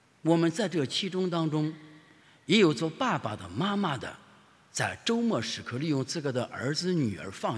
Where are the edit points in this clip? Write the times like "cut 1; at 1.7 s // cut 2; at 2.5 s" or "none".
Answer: none